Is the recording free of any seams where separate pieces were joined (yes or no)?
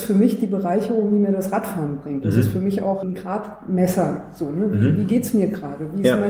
no